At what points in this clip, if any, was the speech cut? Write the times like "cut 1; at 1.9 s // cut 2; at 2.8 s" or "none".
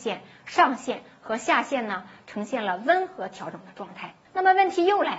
cut 1; at 4.2 s

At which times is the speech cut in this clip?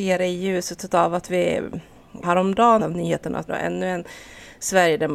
cut 1; at 2.2 s // cut 2; at 2.8 s // cut 3; at 3.5 s

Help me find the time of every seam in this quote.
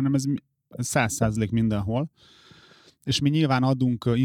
none

